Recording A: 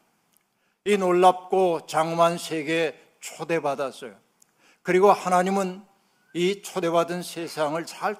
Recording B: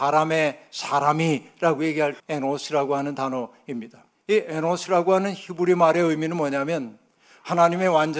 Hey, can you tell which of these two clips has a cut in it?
B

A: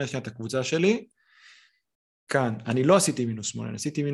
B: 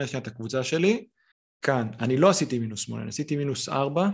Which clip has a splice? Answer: B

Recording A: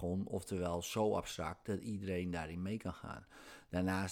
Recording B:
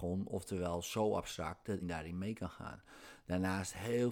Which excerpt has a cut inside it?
B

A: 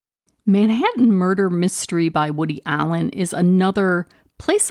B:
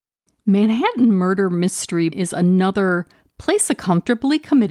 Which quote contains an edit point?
B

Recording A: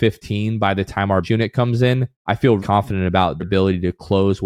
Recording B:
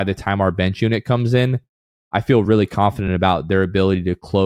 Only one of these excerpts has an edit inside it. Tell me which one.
A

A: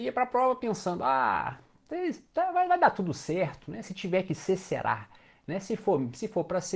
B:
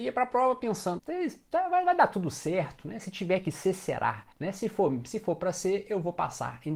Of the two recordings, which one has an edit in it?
B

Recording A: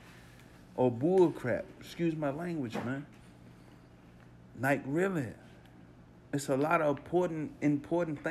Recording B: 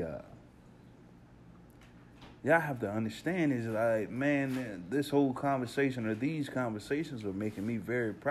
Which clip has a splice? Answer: B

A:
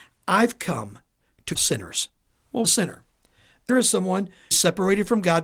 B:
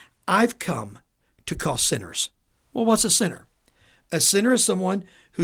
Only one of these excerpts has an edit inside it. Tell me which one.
A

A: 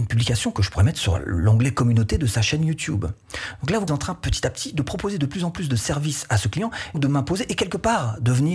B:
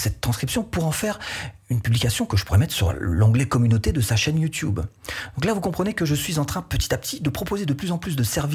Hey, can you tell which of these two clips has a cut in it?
A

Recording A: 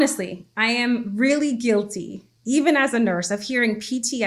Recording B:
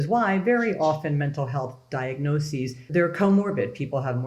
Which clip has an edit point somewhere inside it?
B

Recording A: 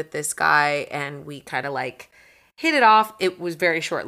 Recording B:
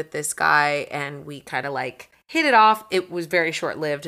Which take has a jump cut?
B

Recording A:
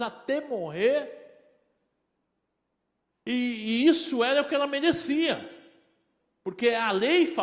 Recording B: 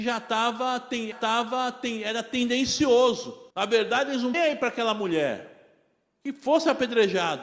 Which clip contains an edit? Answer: B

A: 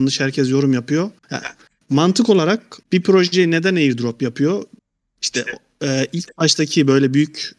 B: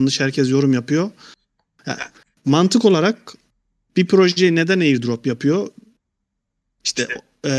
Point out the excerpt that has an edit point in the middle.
A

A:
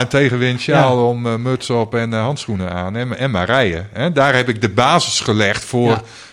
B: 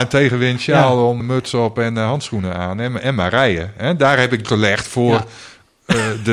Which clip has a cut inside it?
B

